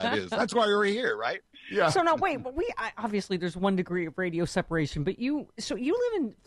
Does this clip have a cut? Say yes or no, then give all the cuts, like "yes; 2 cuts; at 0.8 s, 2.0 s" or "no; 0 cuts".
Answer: no; 0 cuts